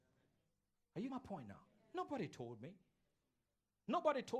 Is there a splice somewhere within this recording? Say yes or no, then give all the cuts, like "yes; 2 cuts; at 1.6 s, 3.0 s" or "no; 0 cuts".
yes; 1 cut; at 1.1 s